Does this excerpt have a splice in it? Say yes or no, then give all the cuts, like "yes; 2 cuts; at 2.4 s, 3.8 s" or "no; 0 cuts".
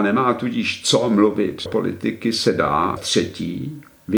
yes; 2 cuts; at 1.7 s, 3.0 s